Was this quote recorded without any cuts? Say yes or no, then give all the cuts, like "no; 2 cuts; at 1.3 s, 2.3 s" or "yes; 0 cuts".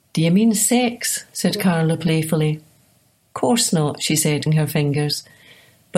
no; 1 cut; at 4.5 s